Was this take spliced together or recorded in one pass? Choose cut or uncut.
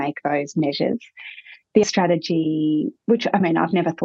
cut